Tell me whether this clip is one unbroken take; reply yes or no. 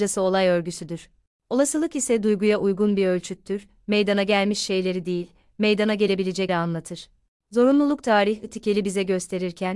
no